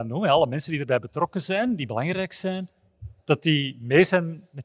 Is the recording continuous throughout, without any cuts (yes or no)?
no